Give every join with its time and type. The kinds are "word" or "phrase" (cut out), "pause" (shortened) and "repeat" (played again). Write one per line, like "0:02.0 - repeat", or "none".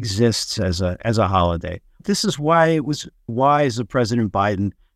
0:03.3 - word